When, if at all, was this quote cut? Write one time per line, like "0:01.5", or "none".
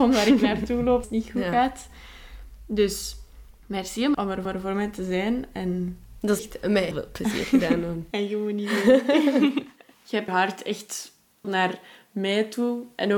0:01.0
0:03.5
0:04.1
0:04.4
0:06.4
0:06.9
0:10.3
0:11.4